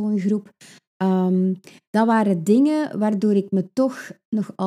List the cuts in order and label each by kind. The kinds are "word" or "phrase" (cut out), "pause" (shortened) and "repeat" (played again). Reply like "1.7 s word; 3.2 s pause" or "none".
none